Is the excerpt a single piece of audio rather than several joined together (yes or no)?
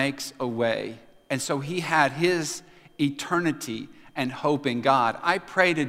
yes